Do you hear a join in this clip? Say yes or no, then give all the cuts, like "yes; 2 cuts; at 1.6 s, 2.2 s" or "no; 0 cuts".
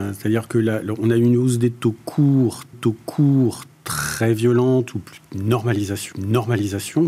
yes; 2 cuts; at 2.7 s, 6.1 s